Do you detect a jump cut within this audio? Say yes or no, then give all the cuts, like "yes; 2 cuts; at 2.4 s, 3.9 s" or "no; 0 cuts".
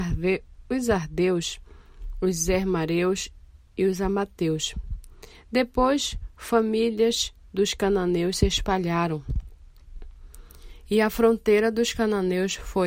no; 0 cuts